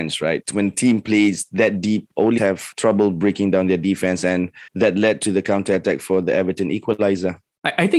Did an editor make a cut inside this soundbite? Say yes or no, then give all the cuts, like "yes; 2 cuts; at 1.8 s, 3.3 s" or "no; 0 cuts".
yes; 2 cuts; at 2.4 s, 4.7 s